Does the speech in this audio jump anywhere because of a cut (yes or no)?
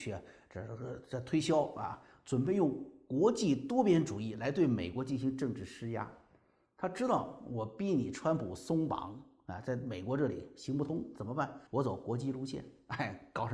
yes